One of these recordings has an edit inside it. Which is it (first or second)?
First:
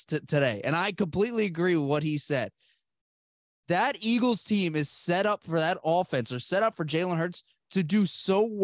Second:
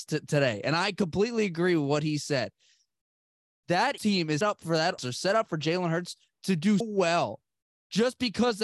second